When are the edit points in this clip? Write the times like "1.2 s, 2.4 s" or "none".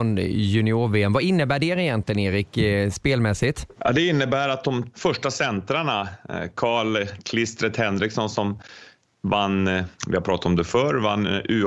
3.7 s, 4.9 s, 9.9 s